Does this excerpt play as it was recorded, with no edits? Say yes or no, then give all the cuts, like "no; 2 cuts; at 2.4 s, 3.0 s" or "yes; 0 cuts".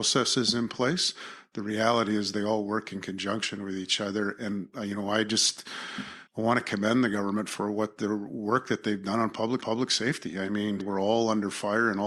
no; 3 cuts; at 6.3 s, 9.6 s, 10.8 s